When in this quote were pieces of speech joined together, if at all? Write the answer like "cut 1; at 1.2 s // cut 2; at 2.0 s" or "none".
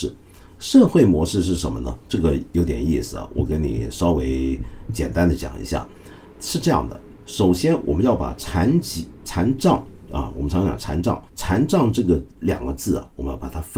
cut 1; at 2.0 s // cut 2; at 11.3 s // cut 3; at 12.3 s

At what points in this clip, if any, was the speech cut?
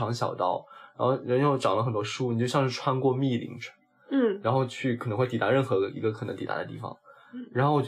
none

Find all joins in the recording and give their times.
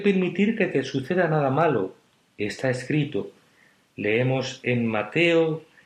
none

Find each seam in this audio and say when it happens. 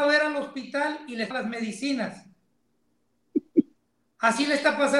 cut 1; at 1.3 s

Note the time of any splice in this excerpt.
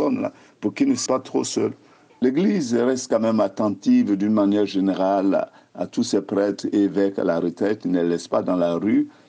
cut 1; at 1.1 s

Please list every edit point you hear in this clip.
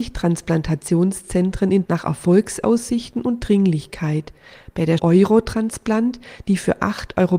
cut 1; at 1.9 s // cut 2; at 5.0 s

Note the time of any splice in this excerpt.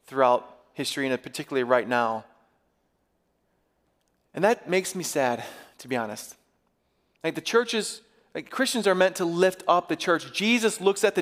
none

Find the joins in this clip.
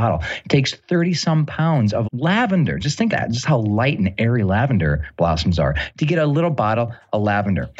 cut 1; at 2.0 s // cut 2; at 3.1 s

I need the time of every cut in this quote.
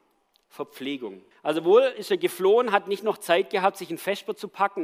cut 1; at 1.3 s

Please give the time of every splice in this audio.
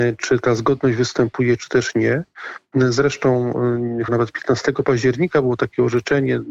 cut 1; at 4.1 s

